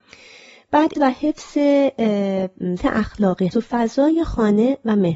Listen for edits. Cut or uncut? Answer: cut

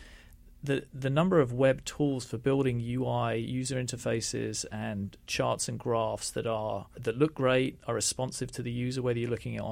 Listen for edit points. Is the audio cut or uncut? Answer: cut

